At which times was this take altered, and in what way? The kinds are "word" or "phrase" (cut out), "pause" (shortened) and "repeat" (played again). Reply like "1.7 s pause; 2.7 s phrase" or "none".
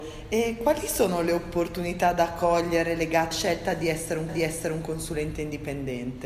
3.3 s word; 4.3 s repeat